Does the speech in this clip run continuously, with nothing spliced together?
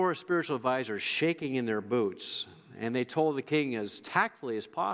yes; 0 cuts

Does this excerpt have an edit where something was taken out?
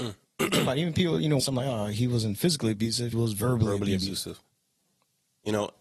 yes; 2 cuts; at 1.4 s, 3.1 s

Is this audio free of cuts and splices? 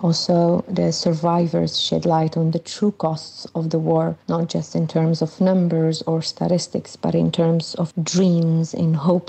no; 1 cut; at 4.2 s

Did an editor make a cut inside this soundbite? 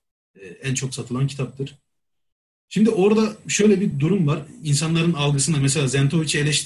no; 0 cuts

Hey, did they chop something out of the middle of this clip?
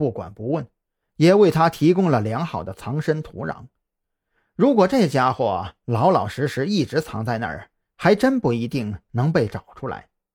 no; 0 cuts

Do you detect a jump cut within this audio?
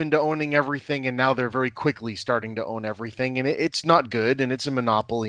no; 0 cuts

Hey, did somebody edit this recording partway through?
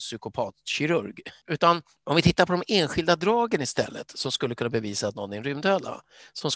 no; 0 cuts

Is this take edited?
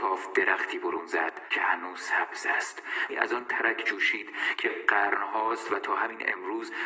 yes; 1 cut; at 3.1 s

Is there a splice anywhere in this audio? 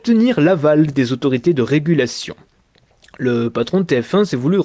no; 0 cuts

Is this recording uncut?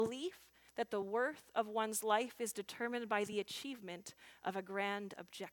yes; 0 cuts

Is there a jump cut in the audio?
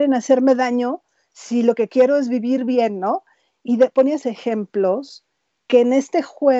yes; 1 cut; at 4.2 s

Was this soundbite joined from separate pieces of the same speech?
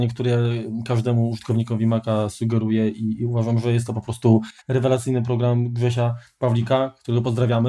yes; 1 cut; at 4.6 s

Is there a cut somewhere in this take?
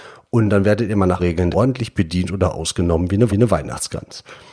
yes; 3 cuts; at 1.2 s, 1.5 s, 3.3 s

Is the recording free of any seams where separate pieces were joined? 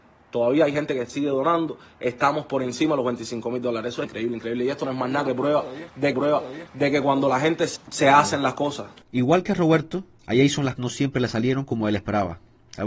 no; 5 cuts; at 4.0 s, 4.8 s, 6.1 s, 7.8 s, 10.8 s

